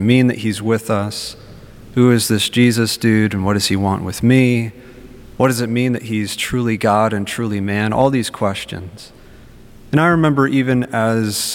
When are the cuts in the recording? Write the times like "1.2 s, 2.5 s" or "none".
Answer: none